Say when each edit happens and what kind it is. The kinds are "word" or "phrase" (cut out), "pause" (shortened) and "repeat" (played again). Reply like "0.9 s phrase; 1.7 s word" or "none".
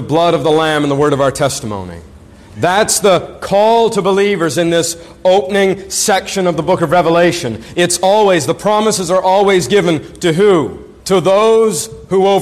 11.0 s pause